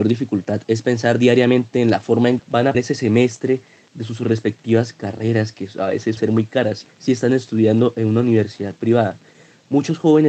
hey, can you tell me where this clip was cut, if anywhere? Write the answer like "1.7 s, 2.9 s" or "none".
2.4 s, 2.7 s, 6.2 s, 6.8 s